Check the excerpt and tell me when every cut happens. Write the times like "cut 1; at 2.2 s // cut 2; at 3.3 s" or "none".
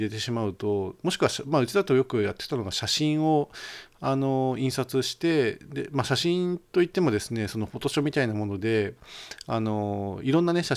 cut 1; at 6.7 s